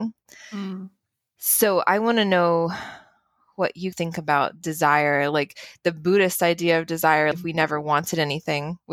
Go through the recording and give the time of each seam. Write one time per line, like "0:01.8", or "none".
0:03.9
0:07.3